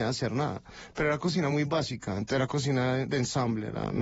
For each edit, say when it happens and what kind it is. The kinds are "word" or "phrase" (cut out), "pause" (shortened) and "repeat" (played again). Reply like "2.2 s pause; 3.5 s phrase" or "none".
none